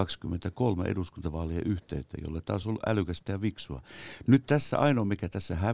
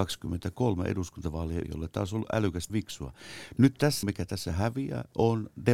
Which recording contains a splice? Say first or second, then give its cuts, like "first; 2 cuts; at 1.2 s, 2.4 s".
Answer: second; 3 cuts; at 1.6 s, 2.7 s, 4.0 s